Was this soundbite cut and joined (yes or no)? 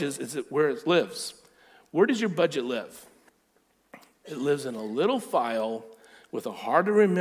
no